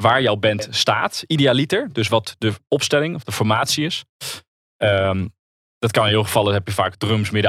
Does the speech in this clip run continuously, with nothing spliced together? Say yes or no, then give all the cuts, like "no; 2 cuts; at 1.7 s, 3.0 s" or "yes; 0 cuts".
yes; 0 cuts